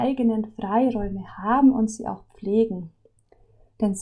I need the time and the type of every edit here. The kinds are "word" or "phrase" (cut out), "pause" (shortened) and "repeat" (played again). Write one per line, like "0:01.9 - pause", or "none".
none